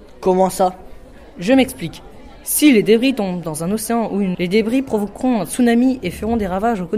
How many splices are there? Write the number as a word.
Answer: one